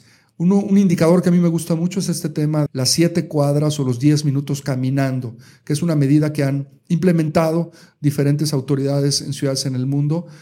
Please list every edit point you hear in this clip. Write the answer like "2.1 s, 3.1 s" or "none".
2.7 s